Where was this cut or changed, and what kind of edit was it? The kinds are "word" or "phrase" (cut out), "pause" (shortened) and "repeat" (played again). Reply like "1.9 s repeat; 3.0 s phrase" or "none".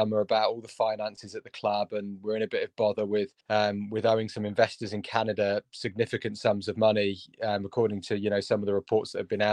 3.4 s pause